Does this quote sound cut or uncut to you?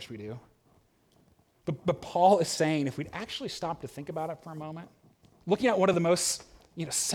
uncut